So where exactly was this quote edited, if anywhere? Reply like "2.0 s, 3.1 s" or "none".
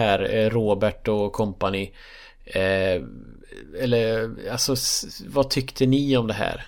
none